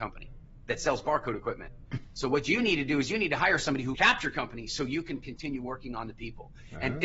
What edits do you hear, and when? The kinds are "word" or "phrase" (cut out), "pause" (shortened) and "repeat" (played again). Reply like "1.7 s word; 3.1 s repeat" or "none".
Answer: 3.9 s phrase